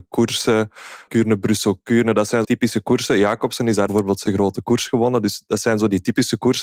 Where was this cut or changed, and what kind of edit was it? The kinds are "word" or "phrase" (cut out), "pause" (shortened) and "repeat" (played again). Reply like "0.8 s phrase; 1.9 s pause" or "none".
1.1 s word; 2.4 s word; 3.9 s phrase; 4.3 s word